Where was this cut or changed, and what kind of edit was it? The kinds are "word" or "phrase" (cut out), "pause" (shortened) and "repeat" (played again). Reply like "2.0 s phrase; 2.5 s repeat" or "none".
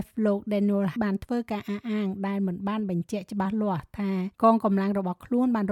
1.0 s word; 4.3 s pause